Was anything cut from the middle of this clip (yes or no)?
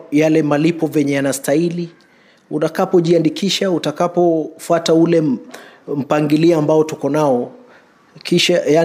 no